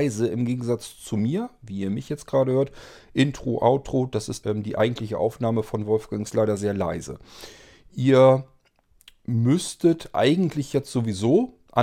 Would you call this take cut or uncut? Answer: cut